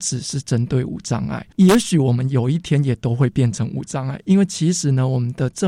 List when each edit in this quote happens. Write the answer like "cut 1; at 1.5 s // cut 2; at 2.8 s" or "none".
cut 1; at 1.5 s